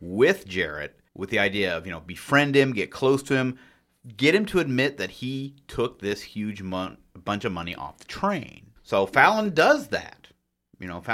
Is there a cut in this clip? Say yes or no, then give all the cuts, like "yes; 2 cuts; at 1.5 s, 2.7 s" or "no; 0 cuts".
yes; 2 cuts; at 1.1 s, 8.8 s